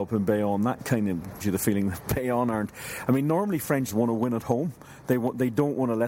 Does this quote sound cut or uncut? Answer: cut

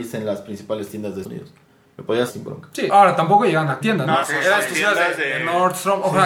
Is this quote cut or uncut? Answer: cut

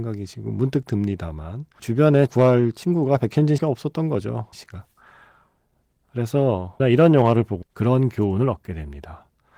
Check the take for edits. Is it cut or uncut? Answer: cut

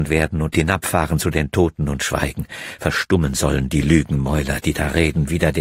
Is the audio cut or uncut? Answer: uncut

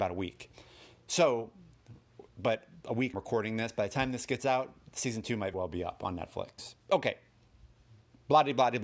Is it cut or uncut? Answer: cut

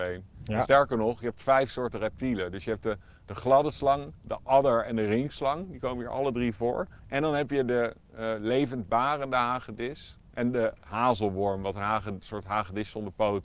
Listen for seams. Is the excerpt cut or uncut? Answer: cut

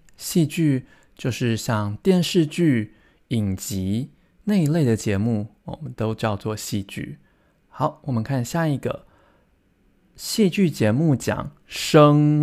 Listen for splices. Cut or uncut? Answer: uncut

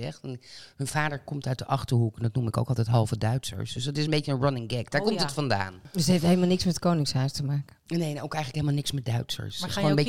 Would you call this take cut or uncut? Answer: uncut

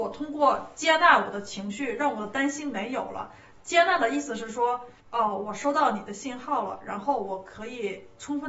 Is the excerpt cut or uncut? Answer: cut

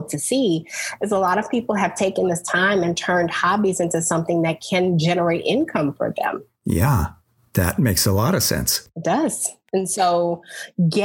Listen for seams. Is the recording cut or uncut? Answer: uncut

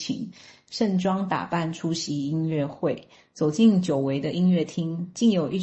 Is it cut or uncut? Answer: uncut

